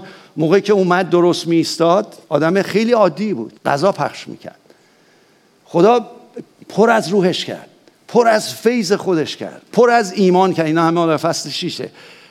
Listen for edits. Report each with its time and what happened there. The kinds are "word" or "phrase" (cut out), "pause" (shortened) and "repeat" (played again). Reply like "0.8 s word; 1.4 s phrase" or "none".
2.2 s pause; 3.6 s pause; 6.6 s pause

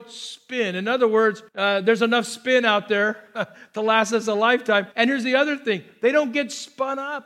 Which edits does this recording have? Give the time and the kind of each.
1.5 s pause; 4.9 s pause

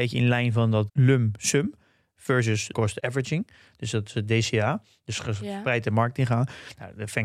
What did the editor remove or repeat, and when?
2.7 s word

